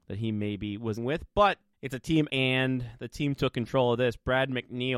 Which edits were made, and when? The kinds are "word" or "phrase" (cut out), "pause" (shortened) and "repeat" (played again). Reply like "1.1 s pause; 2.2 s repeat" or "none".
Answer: 1.0 s word; 2.3 s word